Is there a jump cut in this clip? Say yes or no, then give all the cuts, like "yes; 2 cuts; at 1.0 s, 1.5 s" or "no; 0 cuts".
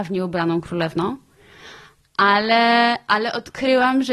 no; 0 cuts